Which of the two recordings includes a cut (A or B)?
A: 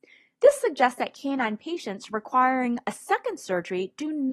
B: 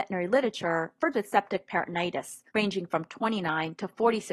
B